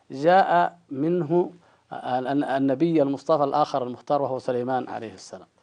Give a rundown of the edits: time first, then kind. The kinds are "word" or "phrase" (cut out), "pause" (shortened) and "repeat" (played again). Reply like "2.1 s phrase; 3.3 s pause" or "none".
1.6 s pause